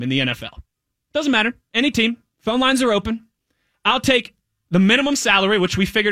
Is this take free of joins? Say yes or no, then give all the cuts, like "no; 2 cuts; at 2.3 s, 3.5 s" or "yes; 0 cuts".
yes; 0 cuts